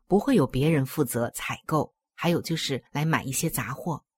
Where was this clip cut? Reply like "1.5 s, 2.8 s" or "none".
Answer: 2.9 s